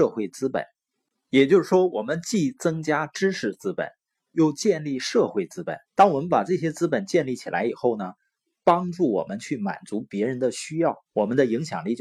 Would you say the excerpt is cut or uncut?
cut